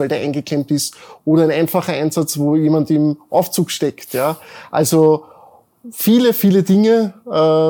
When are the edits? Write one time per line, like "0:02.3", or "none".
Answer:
none